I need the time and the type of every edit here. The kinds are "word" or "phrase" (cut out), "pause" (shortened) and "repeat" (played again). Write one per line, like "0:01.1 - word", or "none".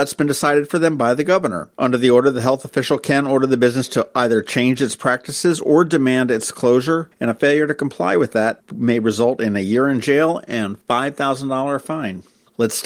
0:01.7 - pause
0:10.8 - pause